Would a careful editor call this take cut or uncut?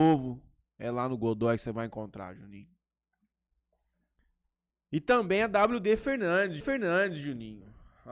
cut